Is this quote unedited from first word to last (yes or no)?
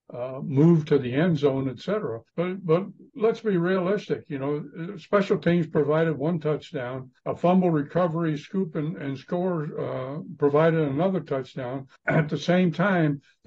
no